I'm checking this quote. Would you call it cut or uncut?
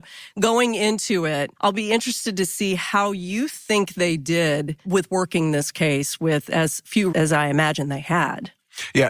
cut